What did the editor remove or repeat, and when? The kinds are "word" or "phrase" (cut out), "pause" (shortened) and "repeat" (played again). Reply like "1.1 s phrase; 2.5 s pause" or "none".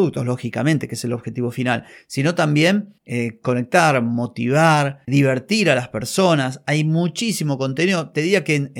5.1 s word